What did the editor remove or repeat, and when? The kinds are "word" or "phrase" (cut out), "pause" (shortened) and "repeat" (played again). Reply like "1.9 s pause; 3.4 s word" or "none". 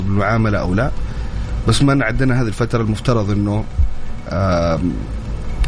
none